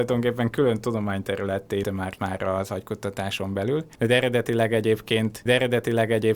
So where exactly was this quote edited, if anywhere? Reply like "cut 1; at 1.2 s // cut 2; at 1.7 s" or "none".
cut 1; at 1.8 s // cut 2; at 2.2 s // cut 3; at 5.5 s

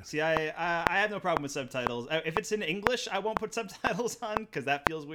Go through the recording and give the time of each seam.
none

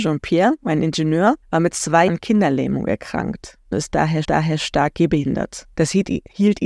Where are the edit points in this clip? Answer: cut 1; at 1.4 s // cut 2; at 2.1 s // cut 3; at 3.7 s // cut 4; at 4.2 s // cut 5; at 5.7 s

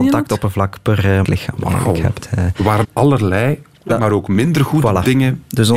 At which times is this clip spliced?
cut 1; at 1.2 s // cut 2; at 2.8 s // cut 3; at 3.9 s

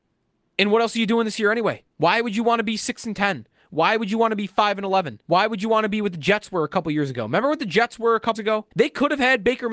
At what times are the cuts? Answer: cut 1; at 1.9 s // cut 2; at 5.2 s // cut 3; at 8.4 s // cut 4; at 8.7 s

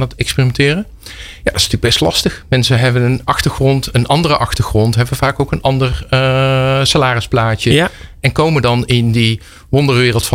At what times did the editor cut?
none

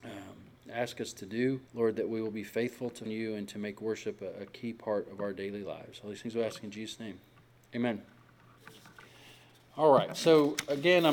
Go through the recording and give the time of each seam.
cut 1; at 1.7 s // cut 2; at 3.1 s

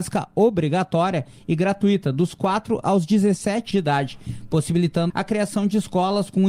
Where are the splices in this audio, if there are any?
cut 1; at 3.7 s // cut 2; at 5.1 s

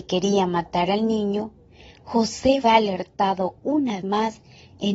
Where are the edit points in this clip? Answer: cut 1; at 2.6 s // cut 2; at 4.0 s

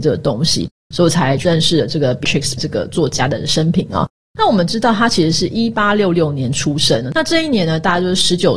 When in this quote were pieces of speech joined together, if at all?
cut 1; at 2.2 s // cut 2; at 2.6 s

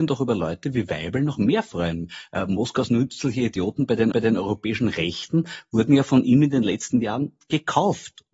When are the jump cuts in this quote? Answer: cut 1; at 4.1 s

